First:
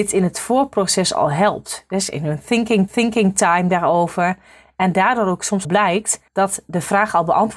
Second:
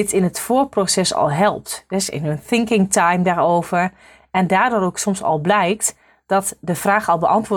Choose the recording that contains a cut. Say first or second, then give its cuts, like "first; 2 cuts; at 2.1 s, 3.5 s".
first; 3 cuts; at 2.9 s, 5.6 s, 6.3 s